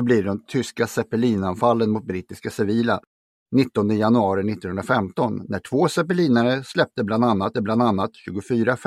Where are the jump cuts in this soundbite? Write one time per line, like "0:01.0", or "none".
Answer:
0:07.5